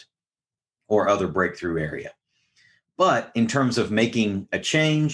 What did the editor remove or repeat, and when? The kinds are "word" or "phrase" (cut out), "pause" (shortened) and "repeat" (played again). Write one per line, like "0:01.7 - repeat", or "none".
none